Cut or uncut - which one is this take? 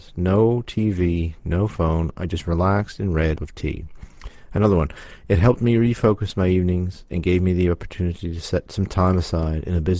cut